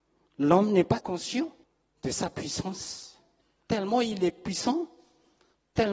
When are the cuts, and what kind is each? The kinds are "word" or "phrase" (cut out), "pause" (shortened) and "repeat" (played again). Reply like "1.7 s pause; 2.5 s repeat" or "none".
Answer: 1.0 s word; 1.6 s pause; 3.4 s pause